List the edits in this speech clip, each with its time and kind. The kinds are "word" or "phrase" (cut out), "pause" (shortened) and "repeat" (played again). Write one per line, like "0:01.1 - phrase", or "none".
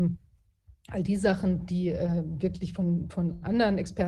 none